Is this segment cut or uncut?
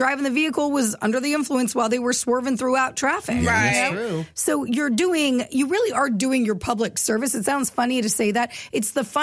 uncut